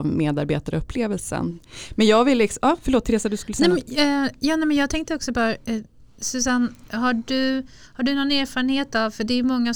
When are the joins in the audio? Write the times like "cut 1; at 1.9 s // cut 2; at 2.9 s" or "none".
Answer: none